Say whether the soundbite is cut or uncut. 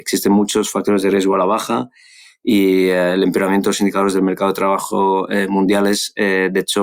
uncut